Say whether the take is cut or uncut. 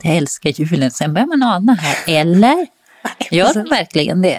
uncut